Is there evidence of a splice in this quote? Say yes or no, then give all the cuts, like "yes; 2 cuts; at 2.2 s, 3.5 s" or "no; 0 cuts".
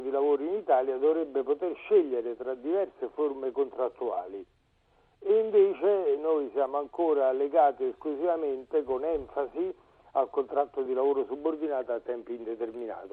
no; 0 cuts